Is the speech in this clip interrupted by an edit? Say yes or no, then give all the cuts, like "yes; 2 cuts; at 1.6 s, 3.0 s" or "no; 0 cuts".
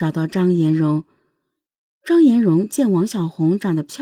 no; 0 cuts